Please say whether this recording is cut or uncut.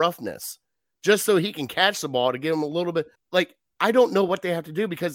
cut